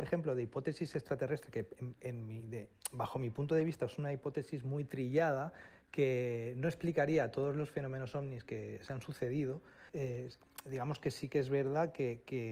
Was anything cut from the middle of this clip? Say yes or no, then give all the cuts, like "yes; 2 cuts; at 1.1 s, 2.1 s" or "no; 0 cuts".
yes; 1 cut; at 9.9 s